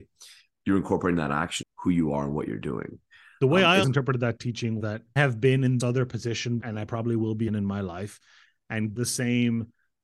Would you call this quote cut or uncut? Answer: cut